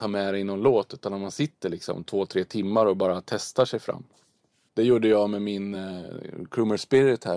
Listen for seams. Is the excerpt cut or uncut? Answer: uncut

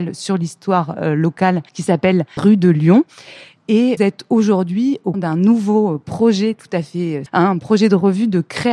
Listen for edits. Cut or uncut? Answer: cut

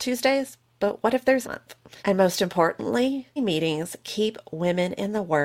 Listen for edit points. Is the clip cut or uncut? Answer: cut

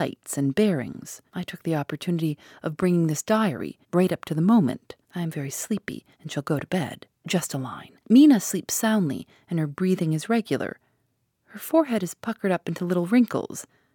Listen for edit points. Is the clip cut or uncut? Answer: cut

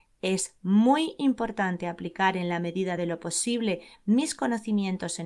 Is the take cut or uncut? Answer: uncut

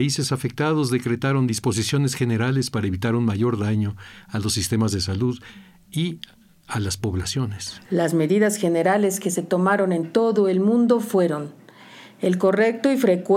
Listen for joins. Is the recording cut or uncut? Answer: uncut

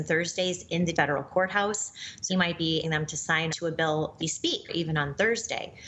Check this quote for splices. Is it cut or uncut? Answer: cut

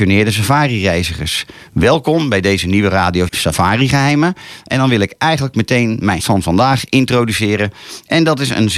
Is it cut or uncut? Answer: cut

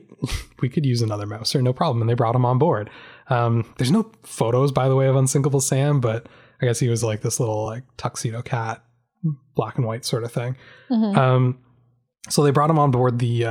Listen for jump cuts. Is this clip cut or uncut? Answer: uncut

